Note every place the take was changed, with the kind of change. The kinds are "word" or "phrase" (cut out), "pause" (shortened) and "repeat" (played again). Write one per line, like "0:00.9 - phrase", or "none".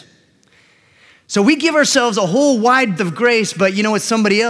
0:03.0 - word